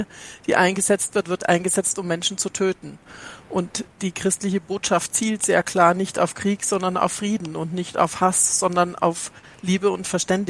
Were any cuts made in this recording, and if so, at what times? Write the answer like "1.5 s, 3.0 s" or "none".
none